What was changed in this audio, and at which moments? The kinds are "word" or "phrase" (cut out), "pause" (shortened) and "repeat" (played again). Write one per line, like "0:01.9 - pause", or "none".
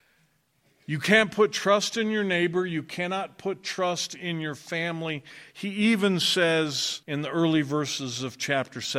0:07.0 - pause